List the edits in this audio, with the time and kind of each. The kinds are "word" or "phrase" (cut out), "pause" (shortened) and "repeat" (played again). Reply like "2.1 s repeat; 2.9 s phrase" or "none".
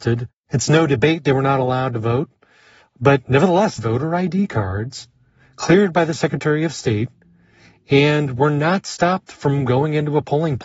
3.8 s phrase

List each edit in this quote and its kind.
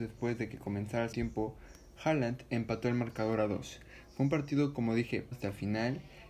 1.1 s word; 5.3 s word

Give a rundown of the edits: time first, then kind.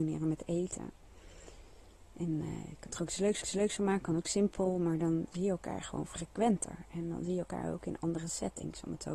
3.4 s repeat

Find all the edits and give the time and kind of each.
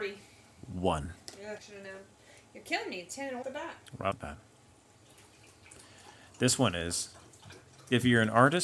1.6 s word; 3.4 s phrase; 4.1 s word

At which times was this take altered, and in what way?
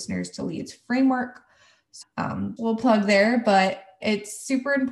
2.0 s word; 2.6 s word; 4.0 s word

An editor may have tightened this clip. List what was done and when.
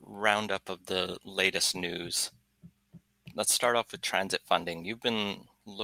none

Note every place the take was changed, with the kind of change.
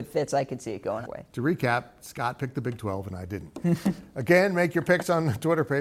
1.1 s word

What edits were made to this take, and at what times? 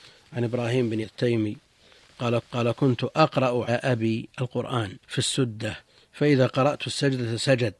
1.0 s word; 2.4 s repeat; 3.7 s word; 5.0 s pause; 5.9 s pause

